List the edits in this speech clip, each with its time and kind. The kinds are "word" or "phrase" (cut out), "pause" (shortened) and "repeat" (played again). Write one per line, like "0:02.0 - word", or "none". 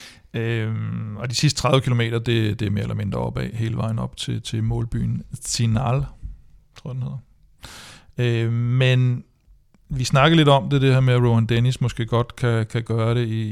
none